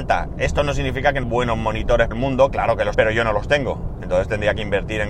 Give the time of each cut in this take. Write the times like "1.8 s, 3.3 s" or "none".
1.2 s, 2.1 s, 2.9 s